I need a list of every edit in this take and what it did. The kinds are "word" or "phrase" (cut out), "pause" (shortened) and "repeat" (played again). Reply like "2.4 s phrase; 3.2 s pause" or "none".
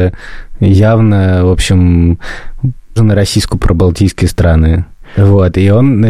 3.0 s word; 3.6 s word